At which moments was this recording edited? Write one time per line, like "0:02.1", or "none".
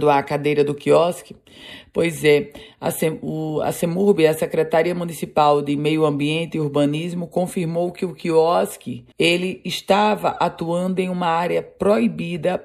0:09.1